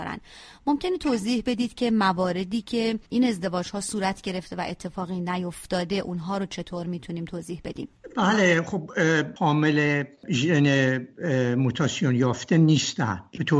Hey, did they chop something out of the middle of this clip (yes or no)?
yes